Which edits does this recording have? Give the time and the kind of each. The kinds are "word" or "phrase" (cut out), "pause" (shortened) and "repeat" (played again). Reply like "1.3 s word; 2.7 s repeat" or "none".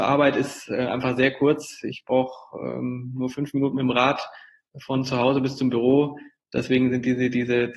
none